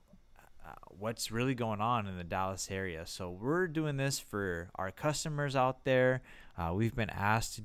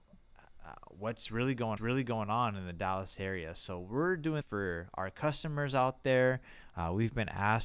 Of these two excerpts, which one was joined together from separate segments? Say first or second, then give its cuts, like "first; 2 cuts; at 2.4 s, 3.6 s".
second; 2 cuts; at 1.8 s, 4.4 s